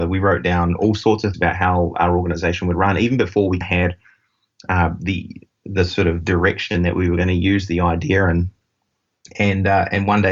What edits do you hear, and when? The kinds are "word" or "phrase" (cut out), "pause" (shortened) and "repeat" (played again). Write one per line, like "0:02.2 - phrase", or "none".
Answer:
0:01.3 - word
0:03.6 - word